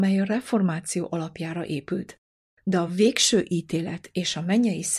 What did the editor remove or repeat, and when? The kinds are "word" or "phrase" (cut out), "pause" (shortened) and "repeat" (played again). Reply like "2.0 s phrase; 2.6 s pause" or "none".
none